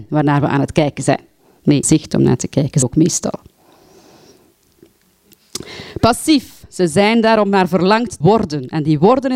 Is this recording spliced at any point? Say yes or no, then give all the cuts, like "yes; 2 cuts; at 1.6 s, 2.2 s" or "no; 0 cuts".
yes; 3 cuts; at 1.8 s, 2.8 s, 8.2 s